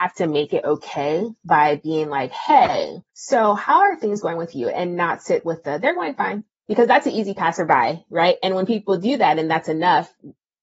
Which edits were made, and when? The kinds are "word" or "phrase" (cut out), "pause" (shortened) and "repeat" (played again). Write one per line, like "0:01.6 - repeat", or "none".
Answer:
0:03.1 - pause